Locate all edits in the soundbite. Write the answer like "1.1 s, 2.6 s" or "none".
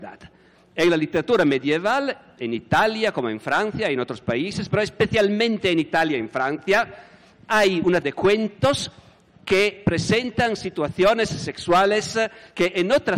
8.0 s